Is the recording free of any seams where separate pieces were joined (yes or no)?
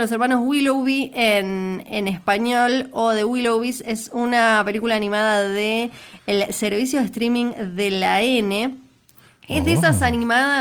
yes